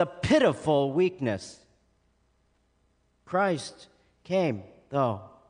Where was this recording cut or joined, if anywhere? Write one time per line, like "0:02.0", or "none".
none